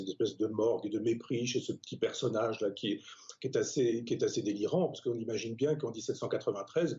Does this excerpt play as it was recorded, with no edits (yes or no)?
yes